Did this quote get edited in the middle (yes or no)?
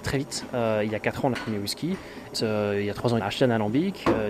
yes